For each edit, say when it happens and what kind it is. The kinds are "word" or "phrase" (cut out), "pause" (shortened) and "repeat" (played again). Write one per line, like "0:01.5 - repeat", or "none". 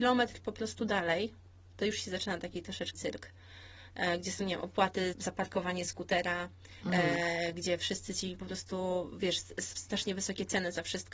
0:02.9 - word
0:05.1 - word
0:08.4 - word
0:09.8 - word